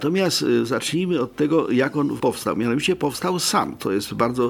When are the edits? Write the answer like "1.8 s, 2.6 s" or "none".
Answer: 2.2 s